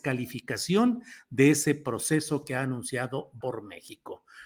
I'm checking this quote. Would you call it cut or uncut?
cut